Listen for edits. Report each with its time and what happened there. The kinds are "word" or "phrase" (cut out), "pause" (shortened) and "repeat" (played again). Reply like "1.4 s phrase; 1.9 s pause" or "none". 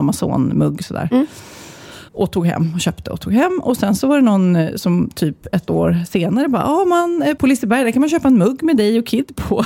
2.1 s pause